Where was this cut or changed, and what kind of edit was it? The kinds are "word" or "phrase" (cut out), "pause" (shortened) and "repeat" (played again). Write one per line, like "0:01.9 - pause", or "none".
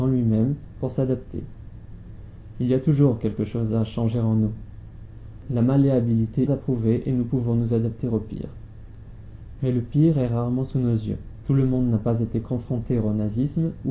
0:06.5 - phrase